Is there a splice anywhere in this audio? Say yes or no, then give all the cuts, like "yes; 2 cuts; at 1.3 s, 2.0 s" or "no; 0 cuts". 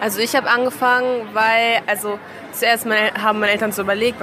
no; 0 cuts